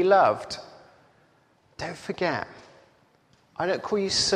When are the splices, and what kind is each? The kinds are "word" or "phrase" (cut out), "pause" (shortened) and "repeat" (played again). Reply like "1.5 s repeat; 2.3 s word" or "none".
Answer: none